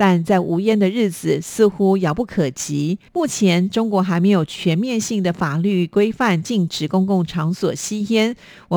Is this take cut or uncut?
cut